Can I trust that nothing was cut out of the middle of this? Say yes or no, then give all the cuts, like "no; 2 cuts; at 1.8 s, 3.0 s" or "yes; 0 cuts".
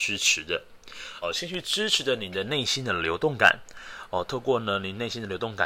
no; 1 cut; at 1.2 s